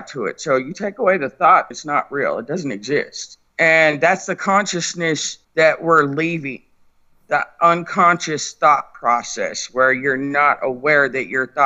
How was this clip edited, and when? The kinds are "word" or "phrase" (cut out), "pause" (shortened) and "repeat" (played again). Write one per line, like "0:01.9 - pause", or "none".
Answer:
0:01.7 - word
0:03.5 - pause
0:05.4 - pause